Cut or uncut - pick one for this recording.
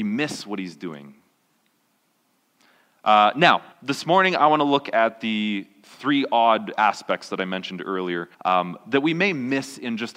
cut